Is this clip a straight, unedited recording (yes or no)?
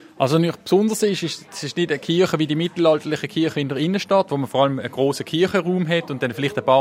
yes